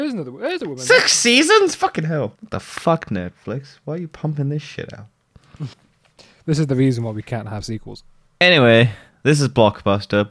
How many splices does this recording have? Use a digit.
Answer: 3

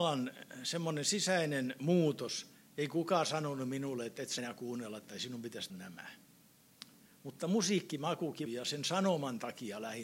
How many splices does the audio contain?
3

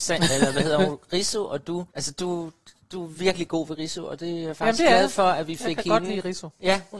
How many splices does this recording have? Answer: 1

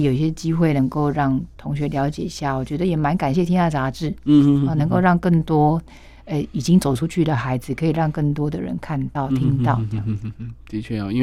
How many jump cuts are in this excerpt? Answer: 0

